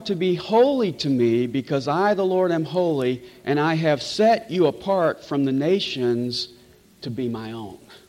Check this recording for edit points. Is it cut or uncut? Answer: uncut